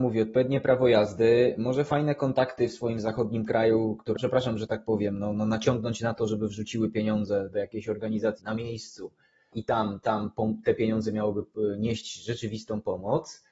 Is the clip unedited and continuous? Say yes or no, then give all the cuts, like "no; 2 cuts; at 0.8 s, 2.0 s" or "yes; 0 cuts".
no; 3 cuts; at 4.2 s, 8.4 s, 9.5 s